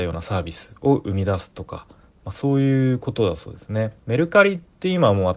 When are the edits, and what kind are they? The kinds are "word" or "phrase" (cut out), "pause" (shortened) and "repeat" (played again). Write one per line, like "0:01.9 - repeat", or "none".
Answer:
0:04.0 - pause